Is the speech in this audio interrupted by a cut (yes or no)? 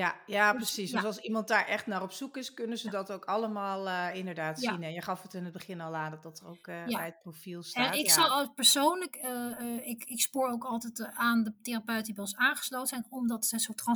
no